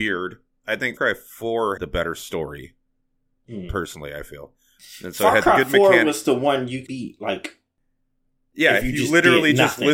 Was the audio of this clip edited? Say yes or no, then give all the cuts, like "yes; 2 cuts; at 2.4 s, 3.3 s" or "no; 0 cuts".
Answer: yes; 3 cuts; at 1.0 s, 1.8 s, 6.9 s